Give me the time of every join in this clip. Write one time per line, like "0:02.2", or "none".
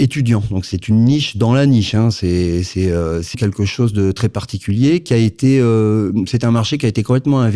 0:03.3

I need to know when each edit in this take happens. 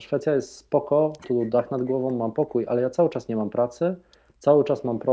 0:01.2

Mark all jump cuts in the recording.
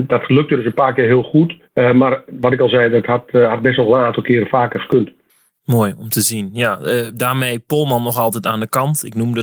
0:01.7
0:05.3

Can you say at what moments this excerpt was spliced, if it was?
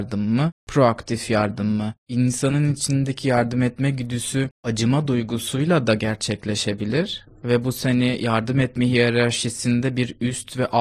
none

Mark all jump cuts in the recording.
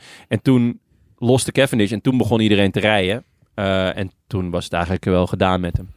none

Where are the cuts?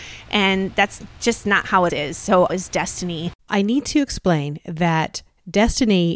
0:01.9
0:02.5
0:03.4

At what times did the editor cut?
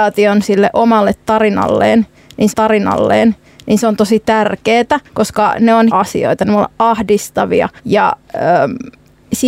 0:02.5
0:05.1
0:05.9
0:07.8

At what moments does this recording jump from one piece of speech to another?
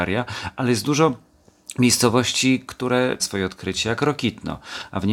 0:03.2

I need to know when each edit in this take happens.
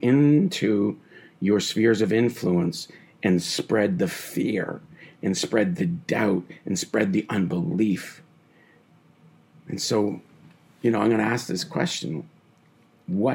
none

